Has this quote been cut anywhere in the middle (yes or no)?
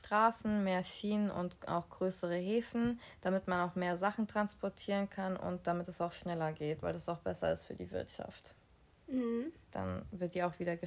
no